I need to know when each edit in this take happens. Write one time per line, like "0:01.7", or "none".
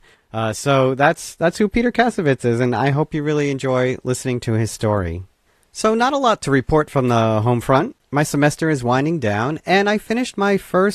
none